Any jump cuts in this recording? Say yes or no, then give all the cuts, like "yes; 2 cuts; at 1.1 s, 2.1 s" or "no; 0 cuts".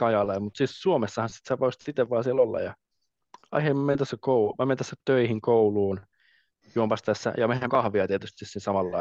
yes; 1 cut; at 7.7 s